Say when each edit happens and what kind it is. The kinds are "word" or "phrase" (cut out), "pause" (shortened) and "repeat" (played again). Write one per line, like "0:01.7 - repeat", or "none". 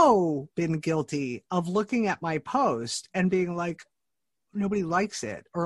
none